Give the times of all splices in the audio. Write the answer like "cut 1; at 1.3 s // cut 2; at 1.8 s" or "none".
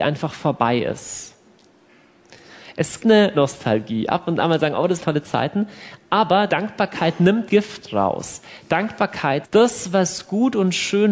cut 1; at 3.0 s // cut 2; at 3.3 s // cut 3; at 5.0 s // cut 4; at 6.5 s // cut 5; at 7.5 s // cut 6; at 9.4 s

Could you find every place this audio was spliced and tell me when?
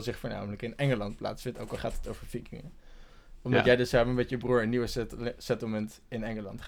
none

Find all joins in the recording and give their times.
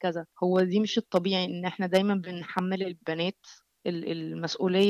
cut 1; at 3.0 s

